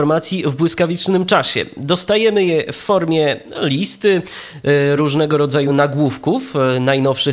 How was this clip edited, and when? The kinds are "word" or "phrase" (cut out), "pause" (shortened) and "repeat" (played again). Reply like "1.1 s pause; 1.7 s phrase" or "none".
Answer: none